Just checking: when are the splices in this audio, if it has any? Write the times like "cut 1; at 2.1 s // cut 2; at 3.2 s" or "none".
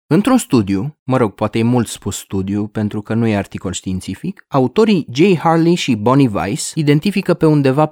none